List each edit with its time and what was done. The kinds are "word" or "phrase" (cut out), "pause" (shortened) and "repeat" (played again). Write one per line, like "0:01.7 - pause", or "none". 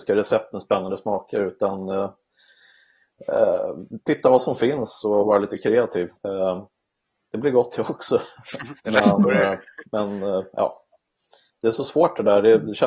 0:06.2 - pause
0:08.8 - pause
0:11.5 - phrase

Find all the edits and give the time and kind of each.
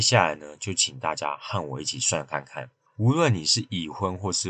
0:02.9 - pause

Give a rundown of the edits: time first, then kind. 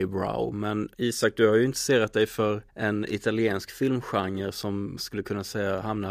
0:00.9 - pause
0:02.7 - pause
0:05.0 - word

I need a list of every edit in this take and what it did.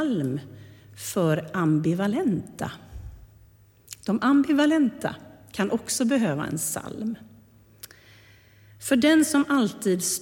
none

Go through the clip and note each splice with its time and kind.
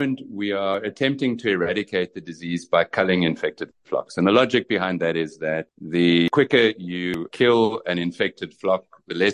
none

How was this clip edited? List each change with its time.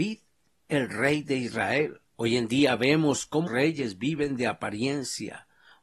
0:02.1 - pause
0:03.5 - word

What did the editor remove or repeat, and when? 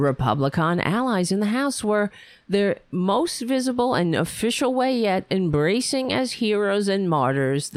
none

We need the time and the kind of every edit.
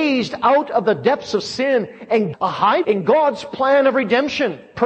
0:02.3 - phrase
0:02.8 - word

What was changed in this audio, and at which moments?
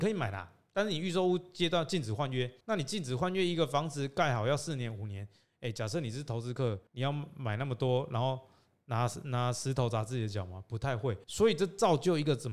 0:02.6 - pause
0:06.9 - pause
0:11.2 - pause

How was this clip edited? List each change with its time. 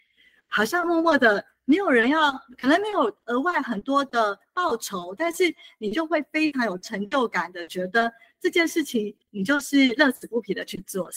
0:09.2 - pause

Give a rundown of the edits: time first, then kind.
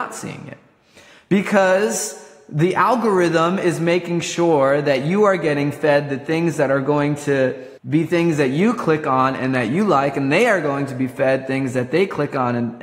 0:07.8 - pause

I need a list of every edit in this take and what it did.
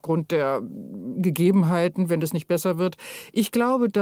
none

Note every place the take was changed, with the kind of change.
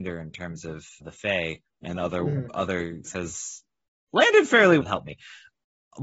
0:01.0 - word
0:01.6 - pause
0:03.1 - phrase
0:04.8 - word

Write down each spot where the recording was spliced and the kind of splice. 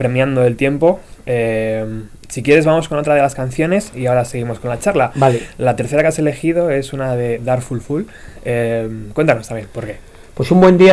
none

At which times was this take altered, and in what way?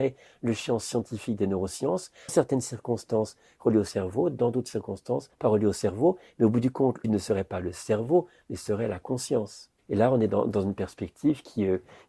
0:02.3 - phrase
0:05.3 - pause
0:07.0 - phrase
0:09.8 - pause

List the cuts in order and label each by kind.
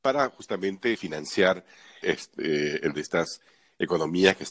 0:00.9 - word
0:02.0 - word
0:02.9 - word

